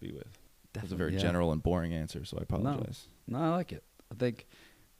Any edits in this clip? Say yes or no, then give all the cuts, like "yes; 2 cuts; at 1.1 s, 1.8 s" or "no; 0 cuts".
no; 0 cuts